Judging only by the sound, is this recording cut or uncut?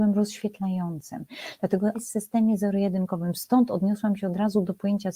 cut